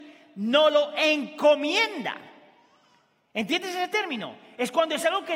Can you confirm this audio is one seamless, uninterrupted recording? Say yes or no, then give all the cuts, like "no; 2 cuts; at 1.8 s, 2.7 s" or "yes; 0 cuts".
yes; 0 cuts